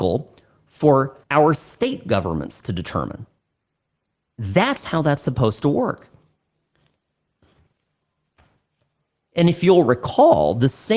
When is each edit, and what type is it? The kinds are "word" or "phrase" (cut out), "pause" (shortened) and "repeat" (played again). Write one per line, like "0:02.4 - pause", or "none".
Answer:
0:01.2 - pause